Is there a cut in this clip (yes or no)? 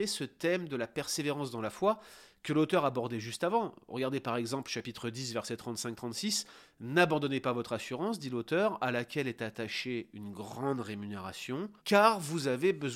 yes